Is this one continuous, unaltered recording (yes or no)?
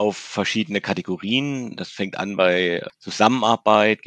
yes